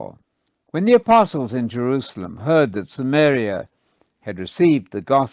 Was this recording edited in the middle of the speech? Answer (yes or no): no